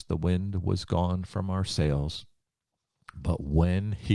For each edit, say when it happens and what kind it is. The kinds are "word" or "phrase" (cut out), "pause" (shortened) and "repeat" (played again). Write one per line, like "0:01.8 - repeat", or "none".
none